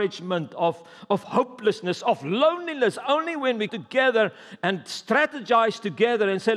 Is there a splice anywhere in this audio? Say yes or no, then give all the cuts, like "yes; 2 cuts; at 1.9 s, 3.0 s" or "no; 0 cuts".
yes; 1 cut; at 3.7 s